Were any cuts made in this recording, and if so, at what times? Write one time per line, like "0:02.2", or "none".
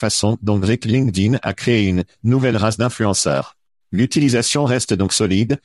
none